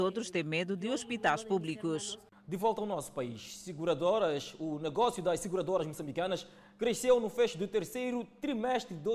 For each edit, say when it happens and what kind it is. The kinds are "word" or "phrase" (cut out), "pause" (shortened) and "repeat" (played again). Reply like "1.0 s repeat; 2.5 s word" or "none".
none